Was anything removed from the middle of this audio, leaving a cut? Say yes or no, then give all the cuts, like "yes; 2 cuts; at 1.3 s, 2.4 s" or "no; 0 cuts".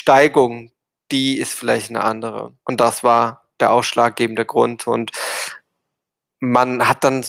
yes; 1 cut; at 2.6 s